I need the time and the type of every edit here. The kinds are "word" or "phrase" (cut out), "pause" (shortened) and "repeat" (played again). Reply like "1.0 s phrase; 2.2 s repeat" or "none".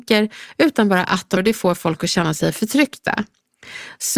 1.4 s word